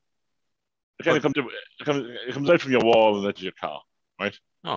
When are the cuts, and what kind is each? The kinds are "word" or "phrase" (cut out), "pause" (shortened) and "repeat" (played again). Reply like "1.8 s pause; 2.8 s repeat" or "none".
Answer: 1.3 s word; 3.4 s word